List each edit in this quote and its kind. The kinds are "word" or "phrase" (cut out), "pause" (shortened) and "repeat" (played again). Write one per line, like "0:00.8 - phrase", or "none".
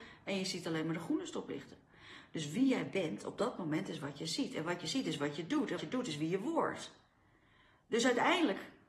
0:05.8 - word